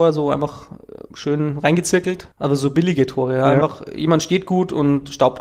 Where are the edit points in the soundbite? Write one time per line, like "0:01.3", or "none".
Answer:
0:02.3